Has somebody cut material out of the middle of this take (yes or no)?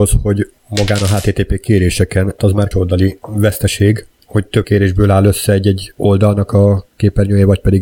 yes